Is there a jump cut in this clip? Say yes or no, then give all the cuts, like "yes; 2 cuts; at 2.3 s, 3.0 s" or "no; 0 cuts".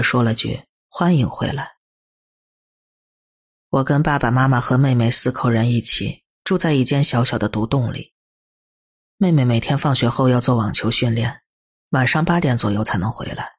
no; 0 cuts